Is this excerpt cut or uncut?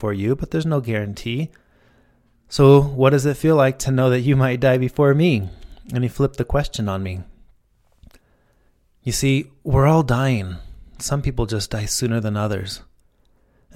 uncut